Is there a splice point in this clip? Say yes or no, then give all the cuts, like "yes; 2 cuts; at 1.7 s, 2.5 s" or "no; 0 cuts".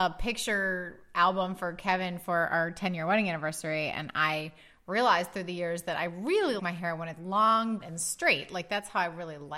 yes; 3 cuts; at 6.6 s, 7.2 s, 7.8 s